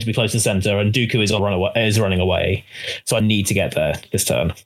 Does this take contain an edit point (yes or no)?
yes